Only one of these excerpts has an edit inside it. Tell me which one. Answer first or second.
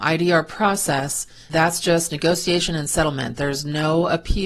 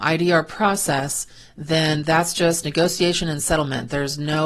first